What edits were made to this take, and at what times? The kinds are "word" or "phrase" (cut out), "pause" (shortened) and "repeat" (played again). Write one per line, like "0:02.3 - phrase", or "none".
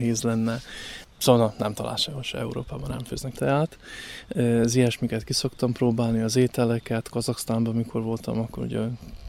0:03.3 - word